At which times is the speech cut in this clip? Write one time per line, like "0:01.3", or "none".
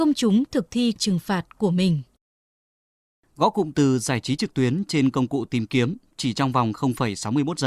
0:01.0